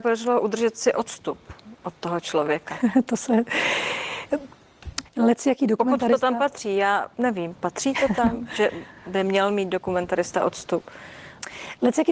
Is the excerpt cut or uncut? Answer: cut